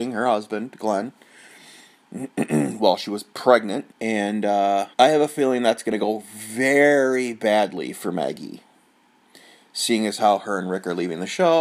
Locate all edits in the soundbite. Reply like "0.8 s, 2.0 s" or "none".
3.9 s, 4.9 s